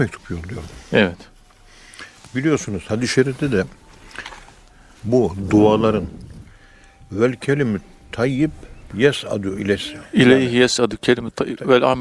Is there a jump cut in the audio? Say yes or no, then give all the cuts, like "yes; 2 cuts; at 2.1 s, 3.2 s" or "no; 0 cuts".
no; 0 cuts